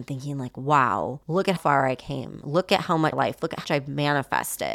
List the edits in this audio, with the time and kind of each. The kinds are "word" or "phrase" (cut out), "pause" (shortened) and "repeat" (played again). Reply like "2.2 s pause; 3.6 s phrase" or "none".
1.2 s pause; 1.6 s word; 3.1 s phrase; 3.6 s word

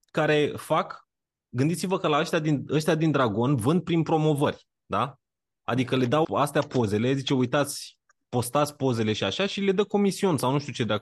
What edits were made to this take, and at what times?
6.2 s word

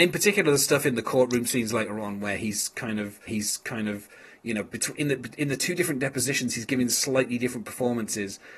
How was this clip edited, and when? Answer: 3.3 s repeat

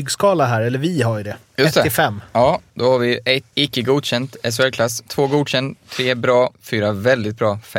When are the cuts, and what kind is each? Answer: 2.7 s pause; 3.5 s word; 6.5 s pause

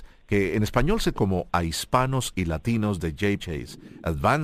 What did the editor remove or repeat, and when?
1.1 s word; 1.5 s word; 3.4 s word

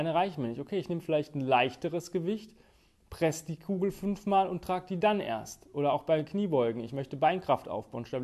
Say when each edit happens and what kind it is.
none

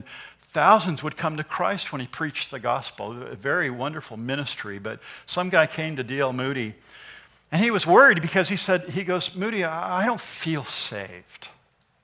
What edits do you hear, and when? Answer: none

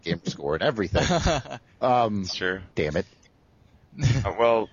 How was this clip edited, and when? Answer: 2.7 s pause

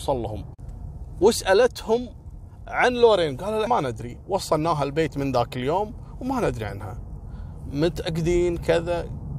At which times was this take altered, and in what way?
3.7 s word

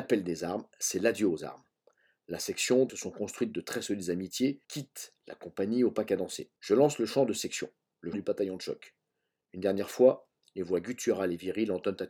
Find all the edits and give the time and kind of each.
2.9 s word; 4.6 s pause; 6.6 s pause; 8.1 s word

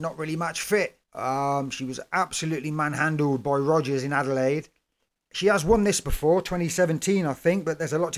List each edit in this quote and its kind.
1.0 s pause; 5.1 s pause

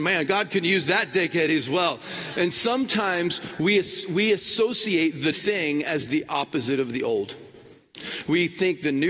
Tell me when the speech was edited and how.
5.3 s word

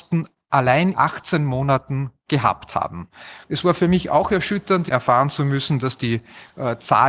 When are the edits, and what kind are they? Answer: 0.9 s word; 3.4 s pause

